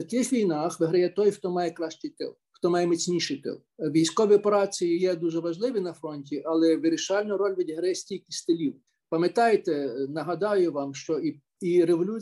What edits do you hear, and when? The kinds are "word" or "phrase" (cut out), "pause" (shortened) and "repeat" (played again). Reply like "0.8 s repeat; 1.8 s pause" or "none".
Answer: 2.4 s pause; 3.7 s pause; 8.9 s pause